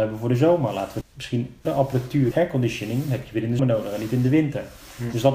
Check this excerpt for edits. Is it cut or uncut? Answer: cut